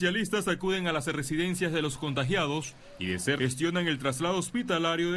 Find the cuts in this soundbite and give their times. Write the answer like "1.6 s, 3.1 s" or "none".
3.4 s